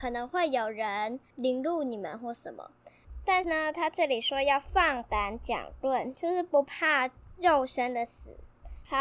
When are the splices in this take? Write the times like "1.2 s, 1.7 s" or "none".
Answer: none